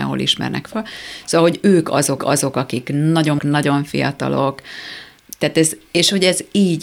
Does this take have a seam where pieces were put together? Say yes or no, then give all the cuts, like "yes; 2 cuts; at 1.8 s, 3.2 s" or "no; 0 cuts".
yes; 3 cuts; at 2.2 s, 3.4 s, 5.9 s